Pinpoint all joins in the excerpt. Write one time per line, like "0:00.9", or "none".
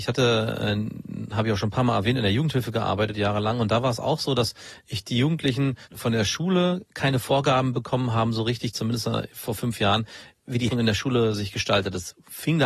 0:05.8
0:10.7